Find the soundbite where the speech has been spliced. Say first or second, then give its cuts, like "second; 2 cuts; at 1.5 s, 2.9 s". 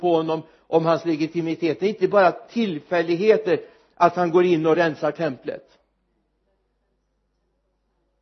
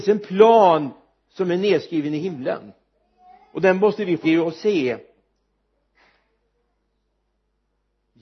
second; 1 cut; at 4.2 s